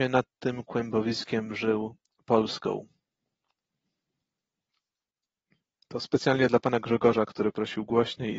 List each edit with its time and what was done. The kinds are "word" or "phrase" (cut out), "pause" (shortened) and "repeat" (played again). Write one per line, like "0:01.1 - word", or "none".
none

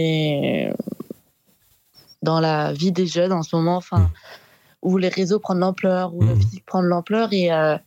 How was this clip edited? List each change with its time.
none

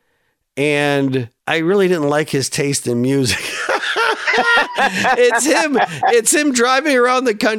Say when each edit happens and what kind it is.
0:01.4 - pause

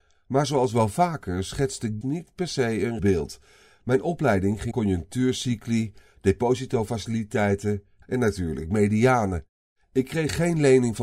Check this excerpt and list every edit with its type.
0:02.0 - word
0:03.0 - word
0:04.7 - word
0:08.0 - word

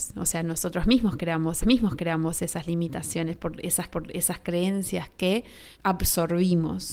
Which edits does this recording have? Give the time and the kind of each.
0:01.6 - repeat
0:03.9 - repeat
0:05.7 - pause

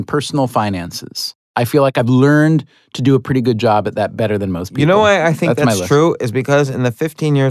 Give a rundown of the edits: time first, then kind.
none

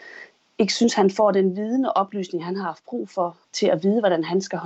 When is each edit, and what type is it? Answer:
none

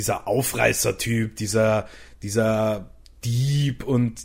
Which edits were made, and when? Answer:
none

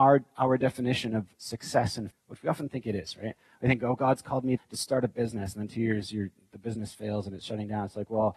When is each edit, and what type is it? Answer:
0:02.1 - word
0:04.6 - word

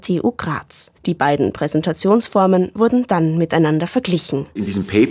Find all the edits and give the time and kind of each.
0:01.0 - pause

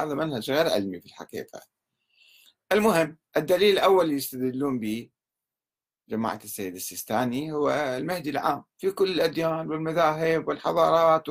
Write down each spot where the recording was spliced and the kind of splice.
none

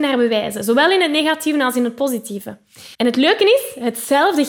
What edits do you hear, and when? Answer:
0:02.9 - pause

